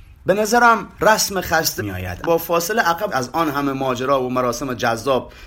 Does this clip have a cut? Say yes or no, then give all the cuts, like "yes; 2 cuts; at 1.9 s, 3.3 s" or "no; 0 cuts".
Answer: yes; 4 cuts; at 0.9 s, 1.8 s, 2.2 s, 3.1 s